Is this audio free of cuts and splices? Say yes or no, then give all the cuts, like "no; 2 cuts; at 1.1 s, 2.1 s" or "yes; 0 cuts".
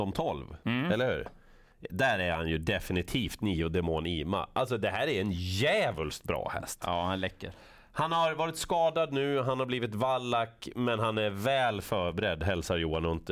yes; 0 cuts